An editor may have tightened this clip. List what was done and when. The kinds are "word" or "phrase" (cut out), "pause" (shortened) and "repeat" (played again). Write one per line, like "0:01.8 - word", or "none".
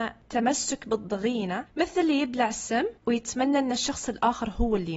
0:03.0 - pause

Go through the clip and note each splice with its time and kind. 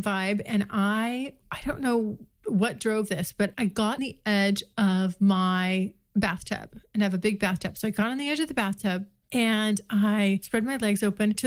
0:04.0 - word

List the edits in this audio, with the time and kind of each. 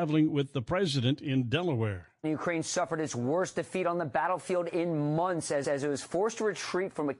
0:05.6 - repeat

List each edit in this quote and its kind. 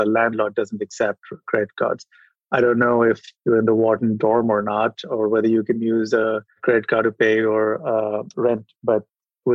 none

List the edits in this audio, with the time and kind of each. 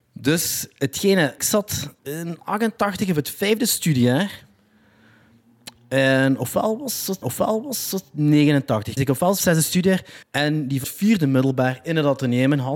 0:01.4 - word
0:02.0 - pause
0:07.2 - repeat
0:09.0 - phrase
0:09.4 - phrase
0:10.2 - pause
0:10.8 - phrase

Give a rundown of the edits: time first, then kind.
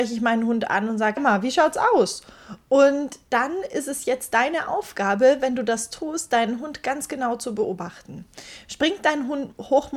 0:01.2 - word

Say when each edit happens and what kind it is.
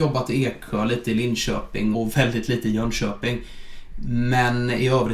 0:01.9 - word

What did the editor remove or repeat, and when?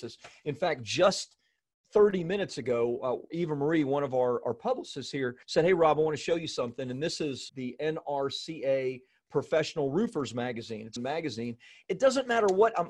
0:03.3 - word
0:05.4 - pause
0:07.5 - word
0:11.0 - phrase

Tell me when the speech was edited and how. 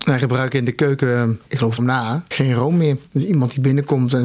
0:01.5 - pause
0:01.8 - phrase
0:02.3 - word
0:03.1 - pause

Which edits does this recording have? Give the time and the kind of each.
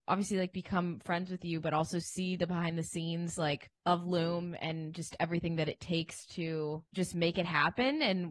0:03.8 - pause
0:06.9 - pause

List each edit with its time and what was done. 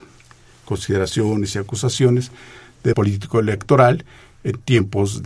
0:02.9 - word

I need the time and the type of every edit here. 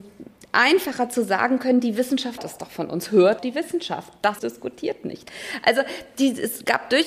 0:02.4 - word
0:03.4 - word
0:04.4 - word

